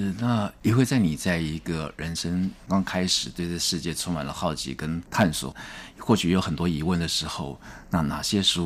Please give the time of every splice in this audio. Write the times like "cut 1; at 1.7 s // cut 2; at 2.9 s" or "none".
cut 1; at 5.1 s

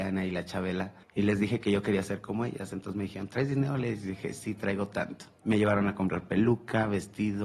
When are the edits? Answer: cut 1; at 1.0 s // cut 2; at 5.3 s

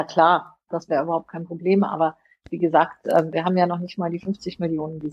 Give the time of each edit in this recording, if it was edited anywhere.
none

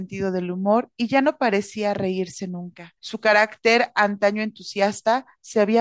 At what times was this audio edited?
cut 1; at 3.0 s

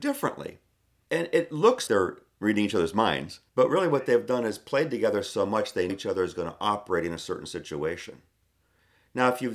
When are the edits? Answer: cut 1; at 1.9 s // cut 2; at 3.5 s // cut 3; at 5.9 s

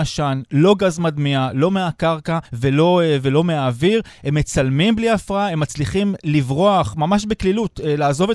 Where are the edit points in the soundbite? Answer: cut 1; at 2.4 s

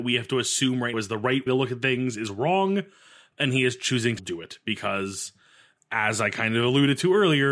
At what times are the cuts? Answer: cut 1; at 0.9 s // cut 2; at 1.5 s // cut 3; at 4.2 s

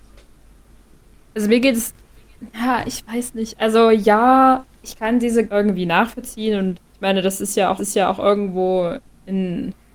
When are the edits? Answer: cut 1; at 4.7 s // cut 2; at 5.5 s // cut 3; at 6.9 s // cut 4; at 7.8 s

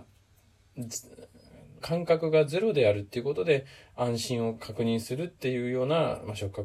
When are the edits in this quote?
cut 1; at 1.8 s

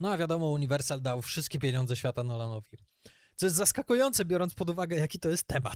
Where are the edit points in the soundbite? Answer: none

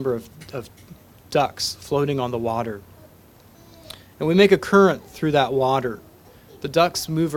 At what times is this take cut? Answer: none

